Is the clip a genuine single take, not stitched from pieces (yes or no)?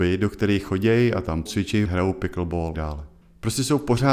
no